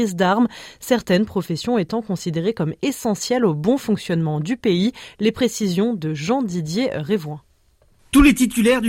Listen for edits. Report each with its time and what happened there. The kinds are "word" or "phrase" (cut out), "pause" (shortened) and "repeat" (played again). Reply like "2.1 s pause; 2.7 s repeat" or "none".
none